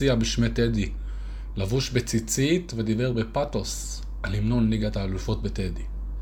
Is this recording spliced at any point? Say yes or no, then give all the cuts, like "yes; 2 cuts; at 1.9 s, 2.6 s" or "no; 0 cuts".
no; 0 cuts